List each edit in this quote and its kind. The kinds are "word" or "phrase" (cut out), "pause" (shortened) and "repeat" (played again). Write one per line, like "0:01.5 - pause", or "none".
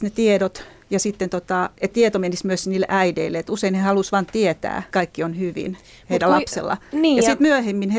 0:01.9 - word
0:04.9 - word